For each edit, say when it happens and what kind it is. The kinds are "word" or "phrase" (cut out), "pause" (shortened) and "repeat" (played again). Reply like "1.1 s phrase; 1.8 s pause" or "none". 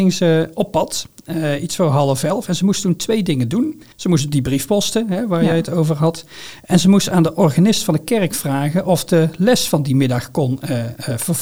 3.9 s pause